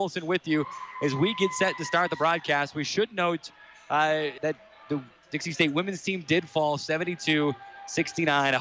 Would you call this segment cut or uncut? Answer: cut